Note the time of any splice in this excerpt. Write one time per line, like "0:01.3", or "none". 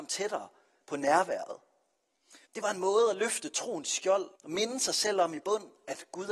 0:02.5
0:04.4